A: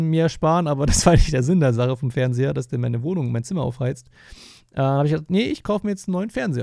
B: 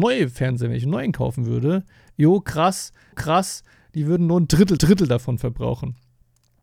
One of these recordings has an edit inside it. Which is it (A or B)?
B